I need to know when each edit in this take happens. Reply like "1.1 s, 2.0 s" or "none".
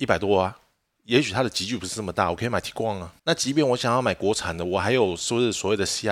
3.2 s